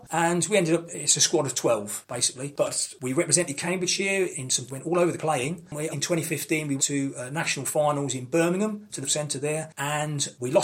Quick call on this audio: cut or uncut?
cut